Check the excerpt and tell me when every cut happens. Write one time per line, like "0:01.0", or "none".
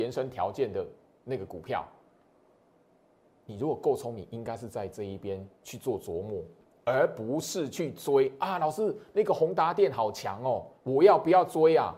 0:10.8